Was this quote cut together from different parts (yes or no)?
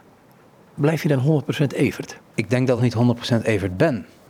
yes